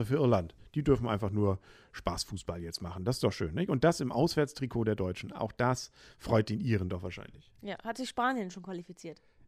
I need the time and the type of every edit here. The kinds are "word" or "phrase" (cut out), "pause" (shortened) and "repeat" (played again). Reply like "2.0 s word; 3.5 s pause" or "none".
none